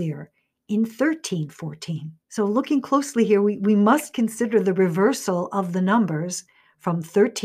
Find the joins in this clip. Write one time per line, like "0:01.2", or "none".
0:02.2